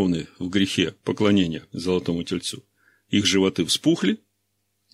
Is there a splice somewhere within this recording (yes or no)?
no